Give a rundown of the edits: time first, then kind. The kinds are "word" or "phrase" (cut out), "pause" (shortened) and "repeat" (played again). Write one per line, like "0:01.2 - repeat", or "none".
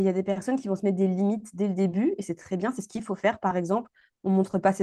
none